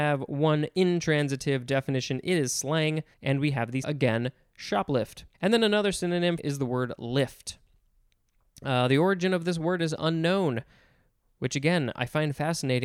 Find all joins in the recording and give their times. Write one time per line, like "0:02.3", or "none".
0:03.1
0:03.8
0:05.3
0:06.4